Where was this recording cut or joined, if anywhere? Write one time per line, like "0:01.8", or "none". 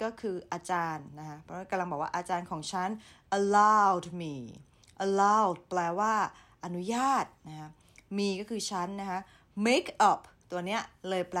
none